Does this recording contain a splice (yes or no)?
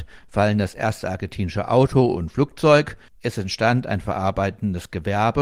no